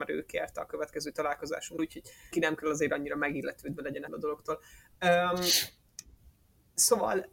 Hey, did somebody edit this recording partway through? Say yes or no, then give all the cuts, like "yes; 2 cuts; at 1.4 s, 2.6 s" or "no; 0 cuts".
yes; 3 cuts; at 1.8 s, 2.3 s, 4.1 s